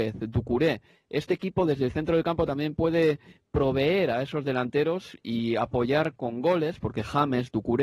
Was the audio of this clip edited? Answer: no; 0 cuts

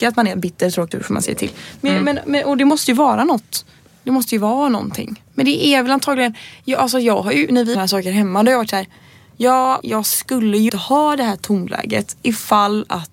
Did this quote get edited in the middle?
yes; 6 cuts; at 0.9 s, 3.9 s, 5.3 s, 7.7 s, 9.8 s, 10.7 s

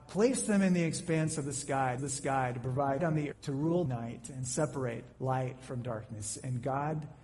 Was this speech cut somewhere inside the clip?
yes; 5 cuts; at 2.0 s, 3.0 s, 3.3 s, 3.9 s, 5.1 s

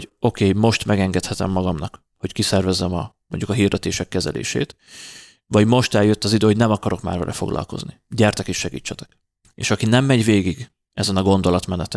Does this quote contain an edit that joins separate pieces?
no; 0 cuts

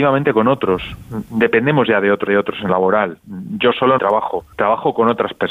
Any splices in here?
yes; 4 cuts; at 2.3 s, 2.7 s, 4.0 s, 4.5 s

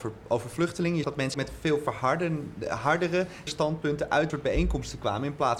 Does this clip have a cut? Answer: yes; 4 cuts; at 1.0 s, 1.3 s, 3.5 s, 4.3 s

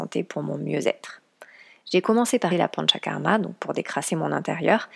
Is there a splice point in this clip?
yes; 1 cut; at 2.5 s

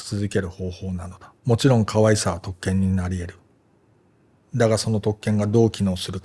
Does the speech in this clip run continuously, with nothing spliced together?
no; 1 cut; at 1.4 s

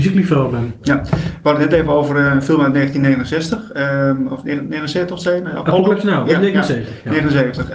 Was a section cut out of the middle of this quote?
no; 0 cuts

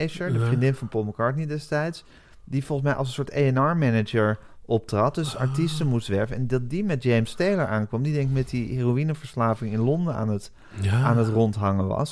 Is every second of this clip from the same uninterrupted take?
yes; 0 cuts

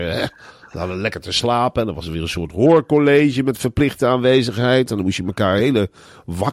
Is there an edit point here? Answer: no; 0 cuts

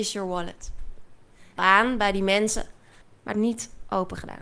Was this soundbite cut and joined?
yes; 3 cuts; at 1.6 s, 3.0 s, 3.3 s

